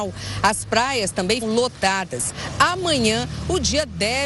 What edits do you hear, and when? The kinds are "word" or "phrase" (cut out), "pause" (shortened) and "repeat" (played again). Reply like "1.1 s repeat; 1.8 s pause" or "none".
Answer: 1.4 s word